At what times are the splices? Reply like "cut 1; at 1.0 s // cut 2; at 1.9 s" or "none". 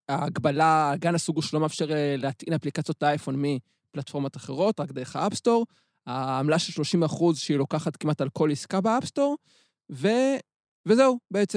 none